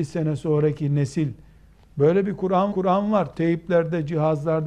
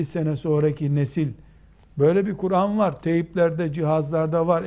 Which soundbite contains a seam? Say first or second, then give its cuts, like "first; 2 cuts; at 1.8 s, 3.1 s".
first; 1 cut; at 2.7 s